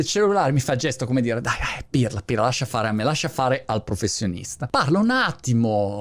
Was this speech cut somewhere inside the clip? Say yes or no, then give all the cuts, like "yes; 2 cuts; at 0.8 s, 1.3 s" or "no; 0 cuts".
no; 0 cuts